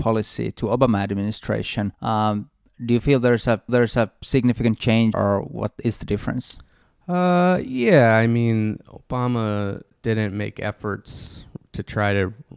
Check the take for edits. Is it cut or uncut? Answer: cut